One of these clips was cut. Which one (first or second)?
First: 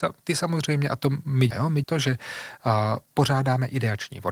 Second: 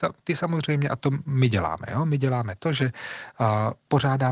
first